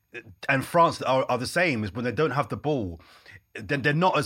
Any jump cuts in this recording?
no; 0 cuts

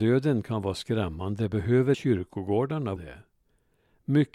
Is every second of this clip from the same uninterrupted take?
no; 2 cuts; at 1.9 s, 3.0 s

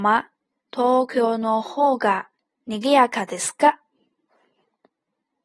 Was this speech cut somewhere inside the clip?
no; 0 cuts

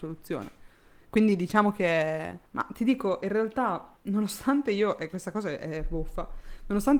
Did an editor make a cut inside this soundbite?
yes; 2 cuts; at 2.5 s, 4.0 s

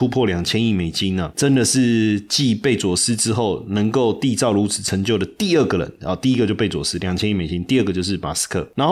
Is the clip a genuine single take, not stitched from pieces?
yes; 0 cuts

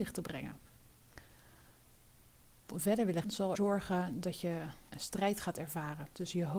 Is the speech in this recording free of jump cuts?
no; 4 cuts; at 2.7 s, 3.2 s, 3.5 s, 4.9 s

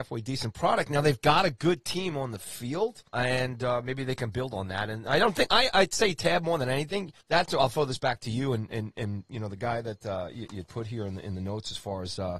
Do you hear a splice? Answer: yes; 2 cuts; at 3.1 s, 7.2 s

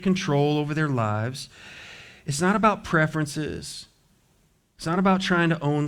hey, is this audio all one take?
yes; 0 cuts

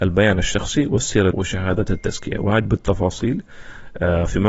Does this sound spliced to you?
yes; 2 cuts; at 1.3 s, 2.6 s

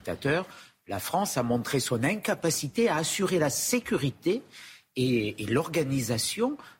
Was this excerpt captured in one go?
yes; 0 cuts

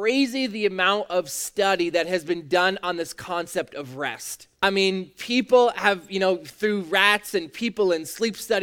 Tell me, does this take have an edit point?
yes; 1 cut; at 4.5 s

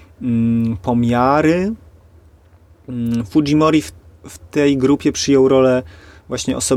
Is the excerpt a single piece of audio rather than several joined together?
yes; 0 cuts

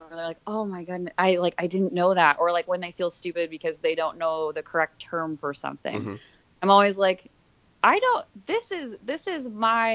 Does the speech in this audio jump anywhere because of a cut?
no; 0 cuts

